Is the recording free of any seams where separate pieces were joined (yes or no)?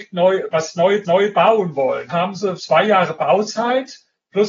no